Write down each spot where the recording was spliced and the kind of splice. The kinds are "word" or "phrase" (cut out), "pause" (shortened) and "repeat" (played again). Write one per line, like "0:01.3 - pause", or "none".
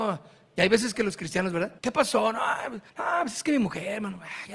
0:00.9 - phrase
0:01.8 - pause
0:02.9 - pause